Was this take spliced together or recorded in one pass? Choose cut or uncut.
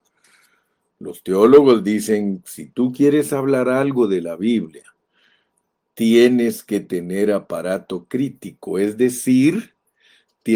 uncut